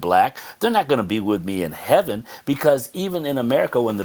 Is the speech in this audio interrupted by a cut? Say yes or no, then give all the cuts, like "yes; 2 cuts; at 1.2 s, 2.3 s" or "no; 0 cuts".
no; 0 cuts